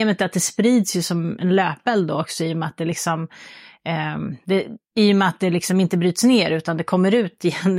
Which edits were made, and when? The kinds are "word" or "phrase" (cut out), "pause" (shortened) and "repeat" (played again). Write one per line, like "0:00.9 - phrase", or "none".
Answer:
0:04.8 - pause